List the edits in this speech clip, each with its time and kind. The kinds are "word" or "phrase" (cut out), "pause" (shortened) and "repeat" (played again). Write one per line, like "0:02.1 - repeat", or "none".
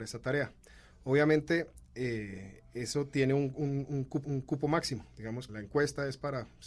0:04.2 - repeat
0:05.5 - word